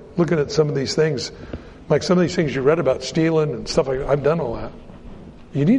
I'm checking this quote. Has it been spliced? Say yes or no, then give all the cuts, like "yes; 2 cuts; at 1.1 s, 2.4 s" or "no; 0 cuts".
no; 0 cuts